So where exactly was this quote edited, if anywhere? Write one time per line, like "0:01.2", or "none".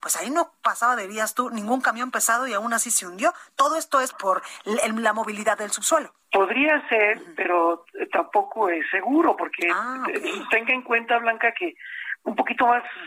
0:04.1
0:06.2

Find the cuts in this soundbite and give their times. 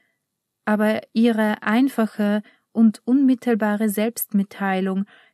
none

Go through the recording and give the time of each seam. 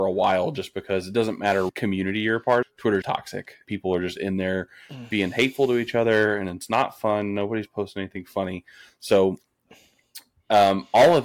0:01.7
0:02.6
0:03.0
0:03.6

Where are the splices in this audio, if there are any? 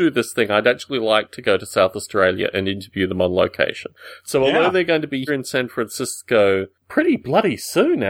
0:05.3

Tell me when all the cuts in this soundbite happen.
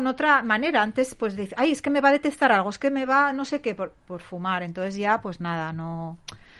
none

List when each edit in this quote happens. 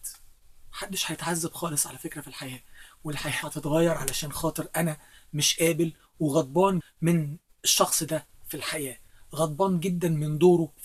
0:03.4
0:06.8

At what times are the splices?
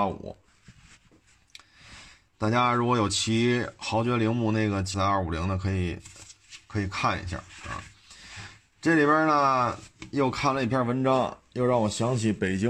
0:04.9

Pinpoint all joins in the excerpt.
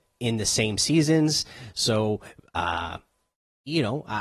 none

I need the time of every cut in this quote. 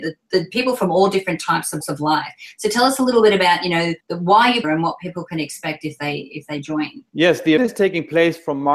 0:01.8
0:04.0
0:04.6
0:07.1
0:07.6

